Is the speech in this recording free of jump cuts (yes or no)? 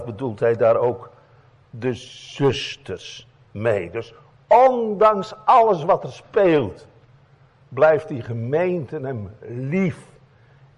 yes